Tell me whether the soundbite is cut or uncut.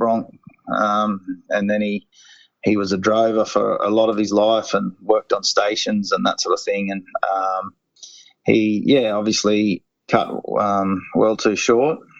uncut